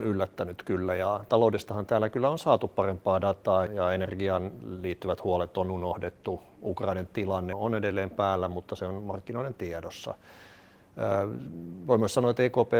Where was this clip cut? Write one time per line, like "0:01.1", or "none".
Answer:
0:03.7
0:07.5